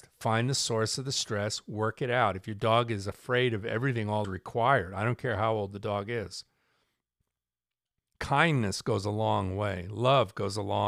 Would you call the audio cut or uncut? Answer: cut